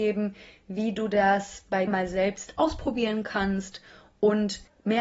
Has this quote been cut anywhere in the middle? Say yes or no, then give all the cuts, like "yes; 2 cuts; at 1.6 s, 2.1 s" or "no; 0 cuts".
yes; 1 cut; at 1.9 s